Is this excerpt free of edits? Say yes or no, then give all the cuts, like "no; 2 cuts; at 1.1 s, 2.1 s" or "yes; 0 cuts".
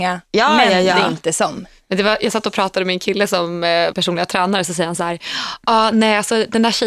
no; 1 cut; at 3.9 s